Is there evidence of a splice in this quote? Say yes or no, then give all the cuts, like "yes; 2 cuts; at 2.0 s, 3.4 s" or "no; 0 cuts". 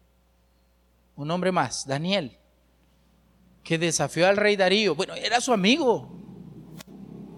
no; 0 cuts